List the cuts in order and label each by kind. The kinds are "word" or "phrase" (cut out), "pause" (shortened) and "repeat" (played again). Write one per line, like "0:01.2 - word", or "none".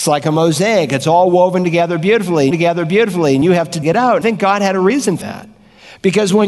0:02.5 - repeat
0:03.8 - word
0:04.2 - word
0:05.2 - word